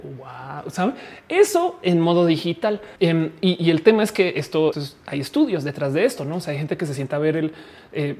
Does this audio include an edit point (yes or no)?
yes